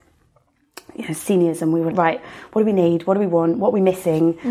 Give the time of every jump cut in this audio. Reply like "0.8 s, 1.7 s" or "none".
1.9 s